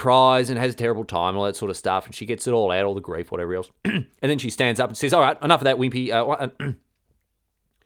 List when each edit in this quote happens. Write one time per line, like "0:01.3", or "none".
none